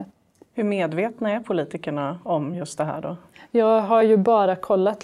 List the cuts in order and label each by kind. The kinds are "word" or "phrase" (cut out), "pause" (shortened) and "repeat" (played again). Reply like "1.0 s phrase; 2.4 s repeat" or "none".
none